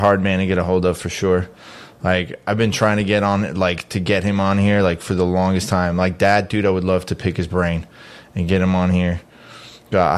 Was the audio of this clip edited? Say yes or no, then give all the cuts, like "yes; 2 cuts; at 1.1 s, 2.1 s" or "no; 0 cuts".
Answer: no; 0 cuts